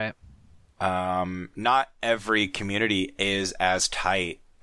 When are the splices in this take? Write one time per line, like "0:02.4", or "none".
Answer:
none